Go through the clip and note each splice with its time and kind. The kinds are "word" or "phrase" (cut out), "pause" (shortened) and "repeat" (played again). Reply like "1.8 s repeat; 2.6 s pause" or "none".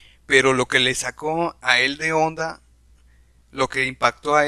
none